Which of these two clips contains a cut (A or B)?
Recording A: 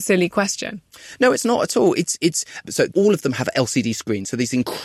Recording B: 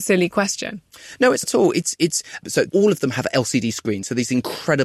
B